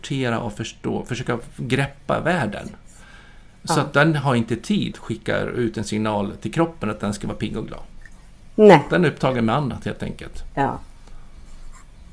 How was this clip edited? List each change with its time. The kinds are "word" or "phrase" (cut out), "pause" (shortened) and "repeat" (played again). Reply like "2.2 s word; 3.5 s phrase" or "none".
4.9 s word